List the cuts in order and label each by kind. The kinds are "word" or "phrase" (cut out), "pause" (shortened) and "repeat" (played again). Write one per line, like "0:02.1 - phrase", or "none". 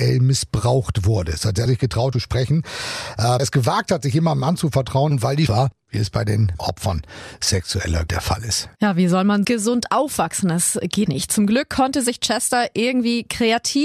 0:01.7 - phrase
0:02.1 - phrase
0:03.4 - phrase
0:05.5 - phrase
0:06.6 - word
0:08.1 - word
0:08.7 - pause
0:09.4 - word
0:11.1 - word

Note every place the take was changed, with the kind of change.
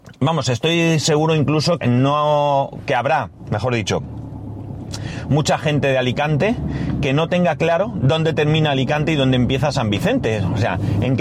0:01.8 - word

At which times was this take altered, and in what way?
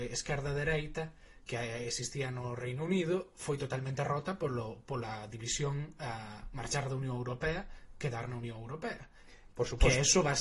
none

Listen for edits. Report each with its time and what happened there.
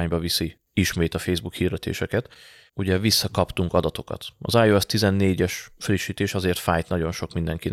0:02.7 - word

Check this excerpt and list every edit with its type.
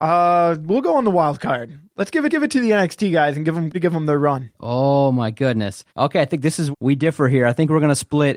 0:02.3 - repeat
0:03.7 - word
0:04.6 - pause
0:05.9 - pause
0:06.7 - word

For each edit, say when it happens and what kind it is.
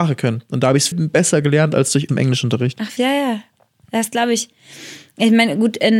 0:00.9 - word
0:02.1 - word
0:03.0 - word

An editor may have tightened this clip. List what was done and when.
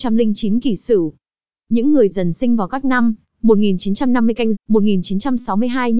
0:02.1 - word
0:04.5 - word

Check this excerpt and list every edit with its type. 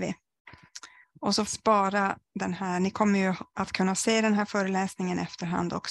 0:01.0 - pause
0:01.5 - phrase

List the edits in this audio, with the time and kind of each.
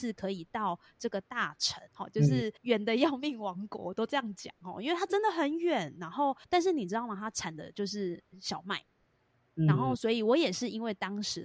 0:01.9 - pause
0:02.6 - pause
0:06.4 - pause

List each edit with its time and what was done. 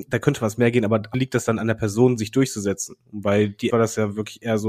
0:01.1 - word
0:03.7 - word

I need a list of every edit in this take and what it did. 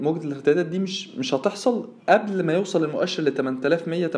0:02.0 - pause

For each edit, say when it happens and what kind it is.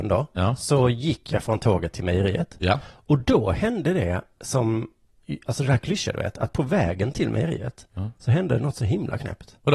none

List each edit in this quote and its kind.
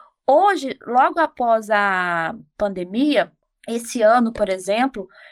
none

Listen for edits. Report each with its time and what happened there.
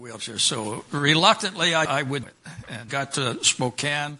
0:01.8 - word
0:02.2 - word
0:02.9 - word

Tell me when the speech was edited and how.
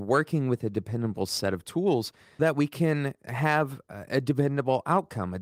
0:02.4 - word

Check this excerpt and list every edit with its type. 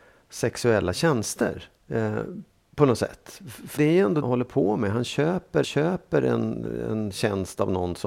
0:01.8 - pause
0:03.8 - word
0:04.2 - phrase
0:05.6 - repeat

